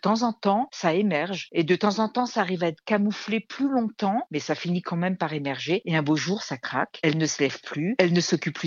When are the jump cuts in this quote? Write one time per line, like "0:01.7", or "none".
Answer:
none